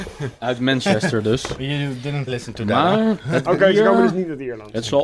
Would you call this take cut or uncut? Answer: cut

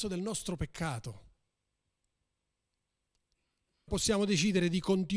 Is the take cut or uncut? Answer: cut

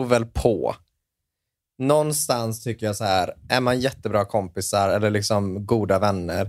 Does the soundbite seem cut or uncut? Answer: uncut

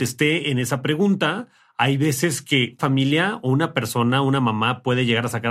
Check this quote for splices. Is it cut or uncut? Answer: cut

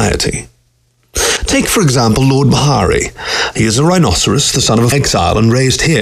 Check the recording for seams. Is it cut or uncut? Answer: cut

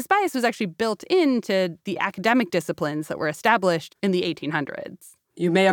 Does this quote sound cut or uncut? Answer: uncut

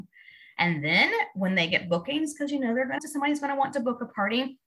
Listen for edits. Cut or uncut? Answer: cut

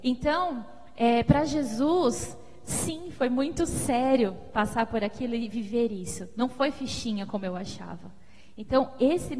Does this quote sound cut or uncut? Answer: uncut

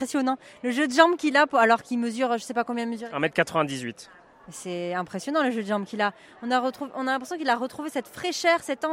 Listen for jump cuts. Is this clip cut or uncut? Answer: uncut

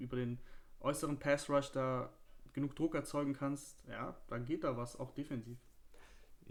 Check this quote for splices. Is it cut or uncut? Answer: uncut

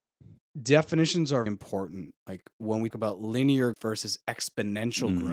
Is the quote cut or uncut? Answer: cut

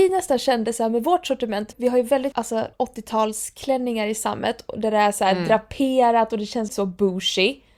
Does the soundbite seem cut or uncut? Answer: cut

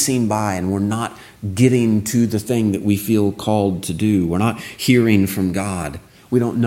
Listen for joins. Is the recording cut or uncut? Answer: uncut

